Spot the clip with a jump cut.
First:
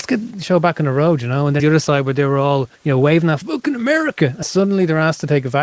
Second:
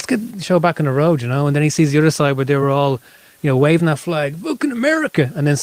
first; 4 cuts; at 1.6 s, 2.8 s, 3.4 s, 4.4 s

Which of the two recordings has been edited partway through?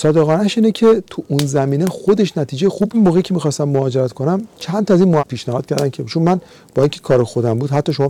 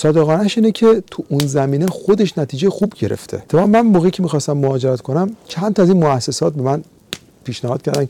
first; 2 cuts; at 2.9 s, 5.2 s

